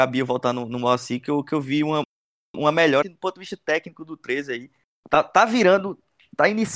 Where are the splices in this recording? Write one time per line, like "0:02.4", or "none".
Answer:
0:03.0